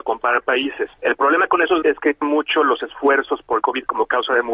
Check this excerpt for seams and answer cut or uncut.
cut